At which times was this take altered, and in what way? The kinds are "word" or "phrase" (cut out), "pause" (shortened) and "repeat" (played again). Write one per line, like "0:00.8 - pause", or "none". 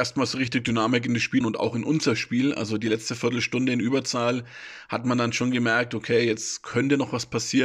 0:01.4 - phrase